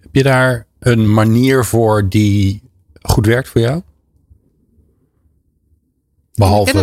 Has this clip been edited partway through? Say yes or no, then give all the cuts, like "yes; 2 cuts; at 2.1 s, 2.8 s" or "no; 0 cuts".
no; 0 cuts